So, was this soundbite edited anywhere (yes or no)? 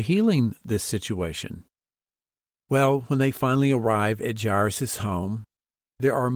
no